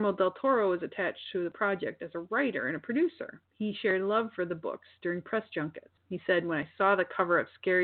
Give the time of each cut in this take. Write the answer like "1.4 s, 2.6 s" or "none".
3.5 s, 6.0 s